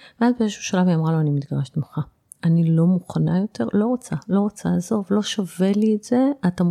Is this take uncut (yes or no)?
yes